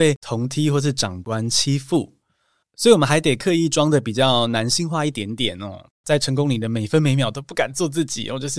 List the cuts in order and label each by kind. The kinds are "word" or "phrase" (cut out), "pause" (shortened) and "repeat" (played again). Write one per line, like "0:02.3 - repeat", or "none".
none